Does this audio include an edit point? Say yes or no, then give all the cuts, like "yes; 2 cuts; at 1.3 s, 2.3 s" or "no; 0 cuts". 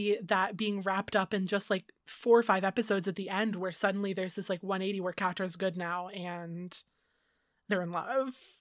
no; 0 cuts